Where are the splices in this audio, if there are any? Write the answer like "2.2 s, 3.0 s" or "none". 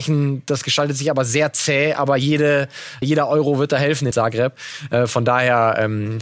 3.0 s, 4.1 s